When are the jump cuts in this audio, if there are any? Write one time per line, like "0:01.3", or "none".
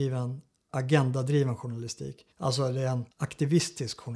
0:02.3
0:03.1